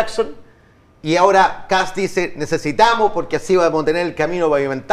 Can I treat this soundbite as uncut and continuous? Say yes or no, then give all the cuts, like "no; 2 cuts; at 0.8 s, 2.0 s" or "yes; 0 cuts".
yes; 0 cuts